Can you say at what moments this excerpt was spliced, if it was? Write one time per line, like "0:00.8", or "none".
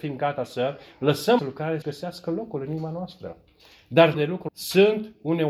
0:01.4
0:01.8
0:04.1
0:04.5